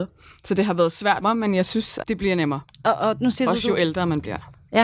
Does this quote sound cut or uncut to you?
cut